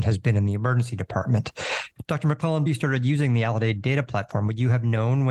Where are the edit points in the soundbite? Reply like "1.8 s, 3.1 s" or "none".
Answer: 2.7 s